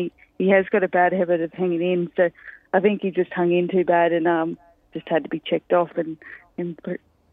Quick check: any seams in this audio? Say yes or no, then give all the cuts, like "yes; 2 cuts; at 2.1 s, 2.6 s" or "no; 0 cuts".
no; 0 cuts